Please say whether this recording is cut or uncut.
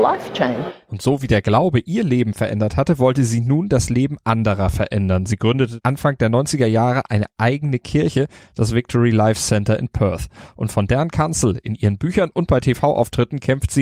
uncut